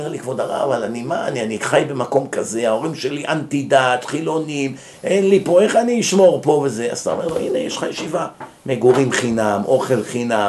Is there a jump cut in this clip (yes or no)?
no